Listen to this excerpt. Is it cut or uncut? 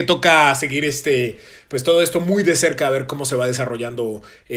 uncut